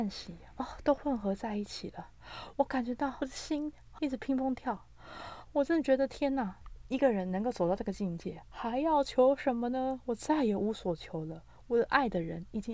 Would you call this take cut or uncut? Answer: cut